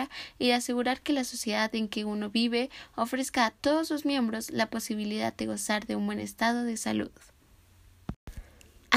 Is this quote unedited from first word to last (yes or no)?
yes